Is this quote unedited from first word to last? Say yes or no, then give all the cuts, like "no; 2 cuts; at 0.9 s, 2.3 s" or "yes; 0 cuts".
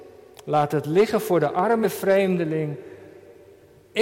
no; 1 cut; at 1.8 s